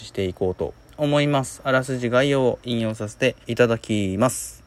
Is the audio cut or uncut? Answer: cut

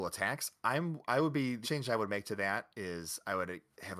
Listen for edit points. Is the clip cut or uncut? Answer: cut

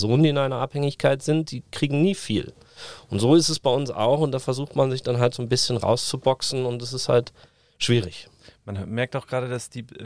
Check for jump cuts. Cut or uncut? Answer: uncut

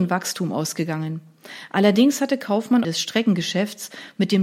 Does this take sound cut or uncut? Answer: cut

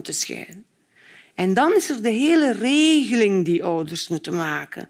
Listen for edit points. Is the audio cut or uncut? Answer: uncut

